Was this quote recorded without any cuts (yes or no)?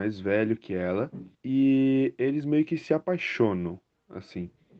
no